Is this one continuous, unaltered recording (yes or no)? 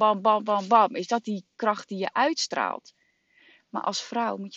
yes